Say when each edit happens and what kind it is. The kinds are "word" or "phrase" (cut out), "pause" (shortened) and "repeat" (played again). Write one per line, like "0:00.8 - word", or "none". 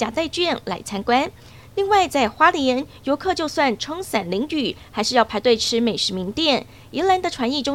none